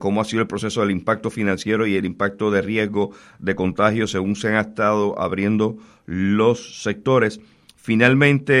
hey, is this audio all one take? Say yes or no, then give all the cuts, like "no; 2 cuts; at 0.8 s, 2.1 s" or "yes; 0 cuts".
yes; 0 cuts